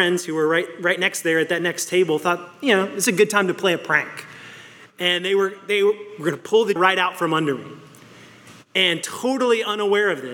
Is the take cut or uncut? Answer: cut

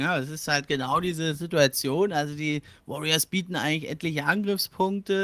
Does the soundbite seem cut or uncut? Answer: uncut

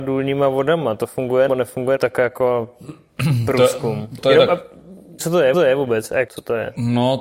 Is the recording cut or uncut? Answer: cut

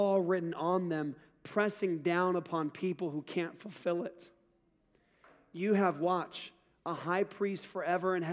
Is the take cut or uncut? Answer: uncut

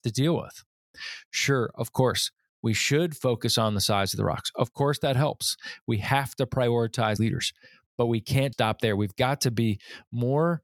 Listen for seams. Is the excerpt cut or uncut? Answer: cut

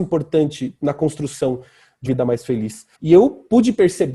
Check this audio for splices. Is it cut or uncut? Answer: cut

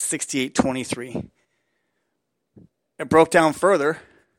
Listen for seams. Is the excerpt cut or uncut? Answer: uncut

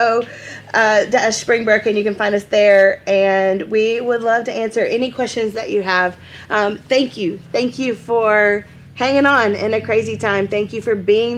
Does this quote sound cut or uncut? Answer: uncut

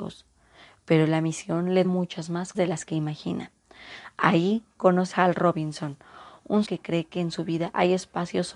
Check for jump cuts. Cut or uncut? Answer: cut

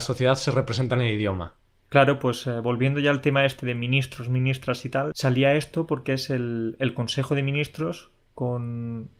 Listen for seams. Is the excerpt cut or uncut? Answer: uncut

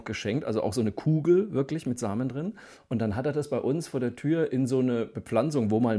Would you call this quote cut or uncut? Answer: uncut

